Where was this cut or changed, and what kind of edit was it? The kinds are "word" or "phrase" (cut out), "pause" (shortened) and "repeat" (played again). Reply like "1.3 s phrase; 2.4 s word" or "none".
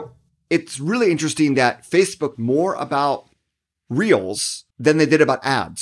2.3 s word; 4.7 s pause